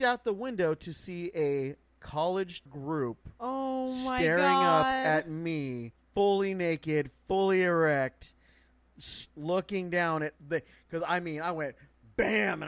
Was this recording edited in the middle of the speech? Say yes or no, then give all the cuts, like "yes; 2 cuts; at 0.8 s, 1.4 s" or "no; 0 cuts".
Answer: yes; 4 cuts; at 2.7 s, 6.0 s, 9.3 s, 10.4 s